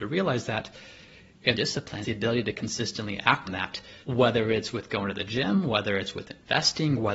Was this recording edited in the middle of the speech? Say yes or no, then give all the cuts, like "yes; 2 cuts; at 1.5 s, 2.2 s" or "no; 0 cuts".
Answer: yes; 4 cuts; at 1.5 s, 2.0 s, 3.5 s, 4.0 s